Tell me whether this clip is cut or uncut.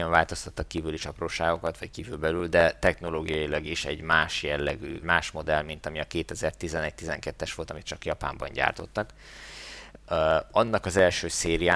cut